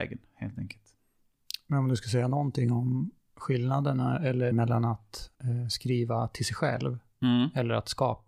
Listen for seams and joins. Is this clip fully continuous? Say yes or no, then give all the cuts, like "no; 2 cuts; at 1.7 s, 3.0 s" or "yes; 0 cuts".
no; 2 cuts; at 4.5 s, 5.3 s